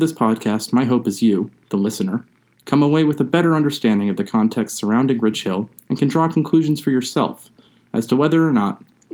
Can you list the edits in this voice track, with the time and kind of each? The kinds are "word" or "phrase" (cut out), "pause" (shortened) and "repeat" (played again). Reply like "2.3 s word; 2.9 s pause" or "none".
none